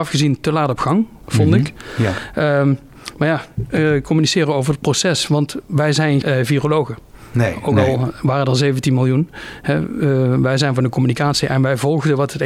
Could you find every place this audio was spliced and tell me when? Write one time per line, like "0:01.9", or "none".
0:06.2